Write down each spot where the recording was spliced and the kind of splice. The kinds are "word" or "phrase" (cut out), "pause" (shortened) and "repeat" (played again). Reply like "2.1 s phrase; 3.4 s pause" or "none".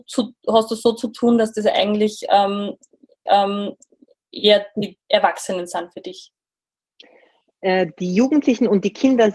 3.3 s repeat; 5.0 s pause